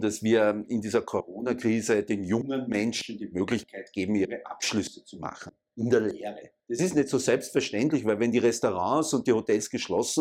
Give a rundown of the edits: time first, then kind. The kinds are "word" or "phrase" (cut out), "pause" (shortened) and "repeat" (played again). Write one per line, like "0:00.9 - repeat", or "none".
0:06.6 - pause